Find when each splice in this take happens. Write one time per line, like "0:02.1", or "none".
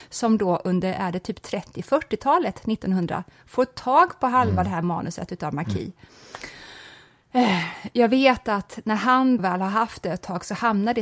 0:09.4